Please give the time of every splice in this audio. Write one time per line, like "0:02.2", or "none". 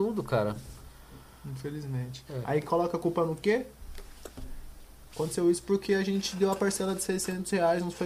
none

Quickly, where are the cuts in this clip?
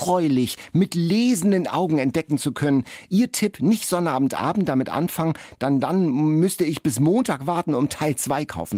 none

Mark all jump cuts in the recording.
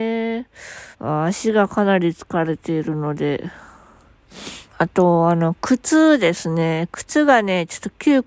0:00.9
0:04.7

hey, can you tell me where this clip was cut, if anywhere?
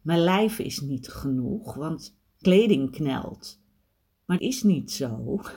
0:01.1
0:02.4
0:04.4

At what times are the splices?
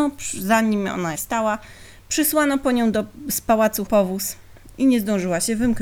0:01.1
0:03.9

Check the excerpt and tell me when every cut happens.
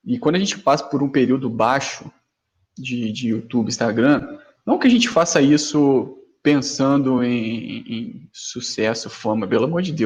none

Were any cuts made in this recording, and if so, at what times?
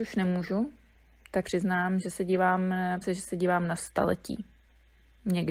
0:01.4
0:03.0
0:03.8

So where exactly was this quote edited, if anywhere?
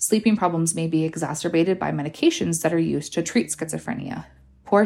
none

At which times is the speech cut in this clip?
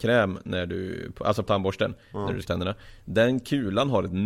0:01.5
0:02.4

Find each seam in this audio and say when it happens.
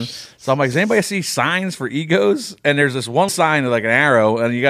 0:03.3

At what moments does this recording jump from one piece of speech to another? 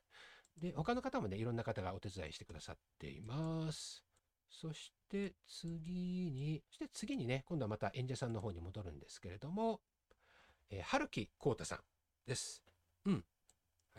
0:04.2
0:05.0
0:06.6

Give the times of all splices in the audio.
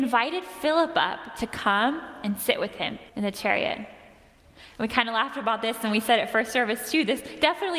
0:03.1

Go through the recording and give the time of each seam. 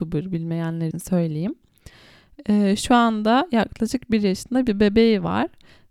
0:00.9

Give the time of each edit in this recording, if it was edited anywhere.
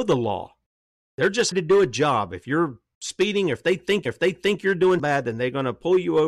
0:01.5
0:04.1
0:05.0

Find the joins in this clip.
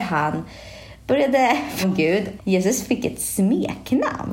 0:01.8
0:02.4

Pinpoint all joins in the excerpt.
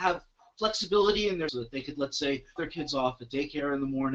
0:01.5
0:02.6

